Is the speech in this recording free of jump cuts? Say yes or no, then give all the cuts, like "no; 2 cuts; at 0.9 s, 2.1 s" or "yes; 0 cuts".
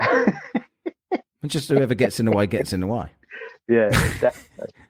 yes; 0 cuts